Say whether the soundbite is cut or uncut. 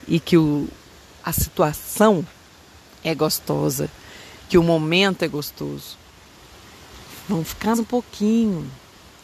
cut